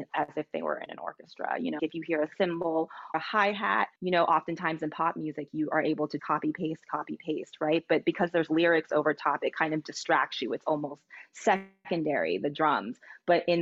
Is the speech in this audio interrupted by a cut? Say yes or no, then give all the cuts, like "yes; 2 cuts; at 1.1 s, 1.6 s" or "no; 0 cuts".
yes; 4 cuts; at 1.8 s, 3.1 s, 4.0 s, 6.2 s